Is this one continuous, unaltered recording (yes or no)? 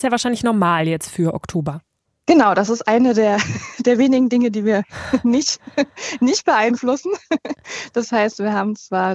yes